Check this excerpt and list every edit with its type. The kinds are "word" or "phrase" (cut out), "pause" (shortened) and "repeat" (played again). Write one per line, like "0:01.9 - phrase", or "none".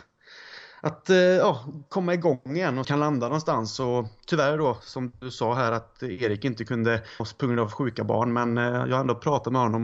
0:02.8 - phrase
0:07.2 - word